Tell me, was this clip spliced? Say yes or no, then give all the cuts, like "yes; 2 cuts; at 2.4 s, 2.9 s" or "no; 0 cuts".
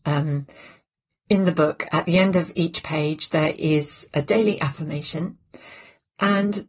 no; 0 cuts